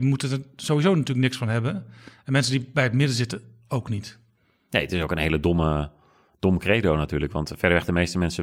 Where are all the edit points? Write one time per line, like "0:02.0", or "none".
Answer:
none